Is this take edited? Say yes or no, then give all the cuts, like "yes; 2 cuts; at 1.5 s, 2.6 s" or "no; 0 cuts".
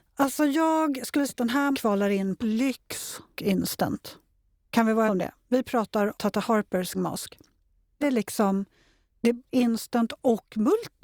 yes; 9 cuts; at 1.3 s, 1.7 s, 2.4 s, 3.4 s, 5.1 s, 6.1 s, 6.9 s, 8.0 s, 9.4 s